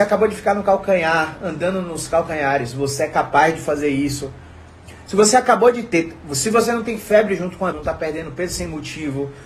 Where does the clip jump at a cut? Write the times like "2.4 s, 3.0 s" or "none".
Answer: 7.7 s